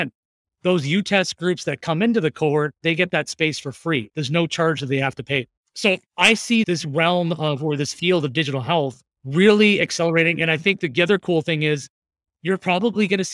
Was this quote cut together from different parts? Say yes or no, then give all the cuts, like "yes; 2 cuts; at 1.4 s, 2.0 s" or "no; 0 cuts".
yes; 2 cuts; at 6.1 s, 9.1 s